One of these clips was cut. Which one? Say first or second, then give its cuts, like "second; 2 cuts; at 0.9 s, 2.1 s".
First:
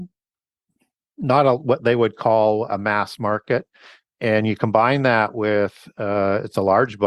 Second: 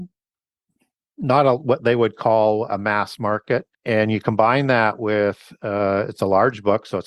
second; 1 cut; at 3.7 s